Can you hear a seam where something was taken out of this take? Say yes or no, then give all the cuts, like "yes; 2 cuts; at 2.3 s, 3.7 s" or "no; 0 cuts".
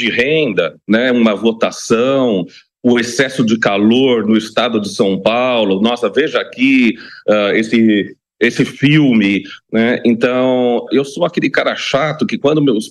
yes; 1 cut; at 10.9 s